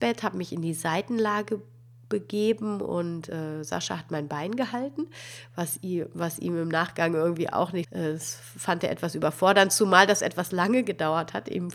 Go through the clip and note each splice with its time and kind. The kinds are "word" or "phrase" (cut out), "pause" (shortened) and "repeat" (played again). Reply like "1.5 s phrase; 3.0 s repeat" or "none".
7.8 s word